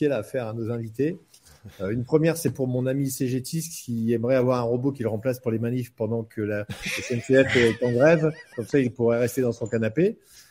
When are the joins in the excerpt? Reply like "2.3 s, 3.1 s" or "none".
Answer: none

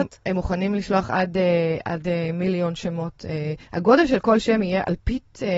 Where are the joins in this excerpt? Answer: 3.6 s

